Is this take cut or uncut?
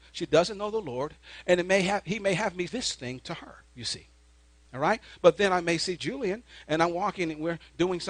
cut